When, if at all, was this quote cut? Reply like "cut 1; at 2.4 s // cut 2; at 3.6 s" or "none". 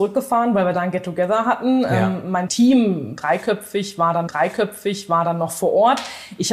cut 1; at 2.5 s // cut 2; at 4.3 s